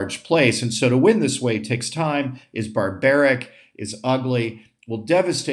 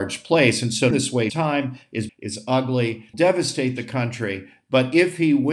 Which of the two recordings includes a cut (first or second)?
second